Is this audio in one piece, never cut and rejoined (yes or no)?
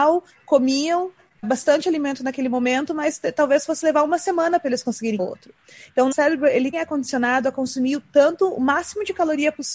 no